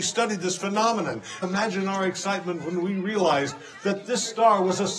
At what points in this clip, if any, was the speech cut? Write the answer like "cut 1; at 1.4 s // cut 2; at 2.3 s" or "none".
cut 1; at 1.4 s